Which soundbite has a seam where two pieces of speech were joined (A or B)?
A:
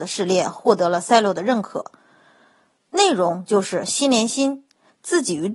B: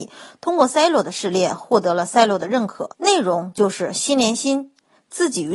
B